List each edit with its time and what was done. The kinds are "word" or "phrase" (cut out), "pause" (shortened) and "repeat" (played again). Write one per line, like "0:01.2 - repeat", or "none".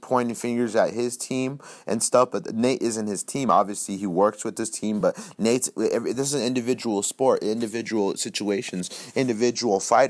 none